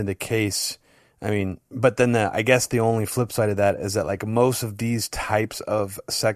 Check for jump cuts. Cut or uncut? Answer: uncut